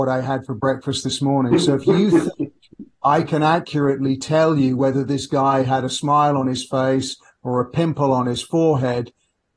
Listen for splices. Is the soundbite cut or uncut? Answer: uncut